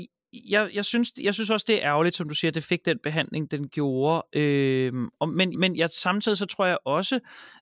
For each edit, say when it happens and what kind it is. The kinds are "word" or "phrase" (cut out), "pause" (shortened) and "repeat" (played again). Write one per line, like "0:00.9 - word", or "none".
0:05.5 - repeat